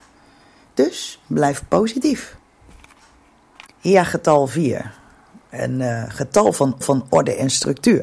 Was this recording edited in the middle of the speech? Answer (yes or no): yes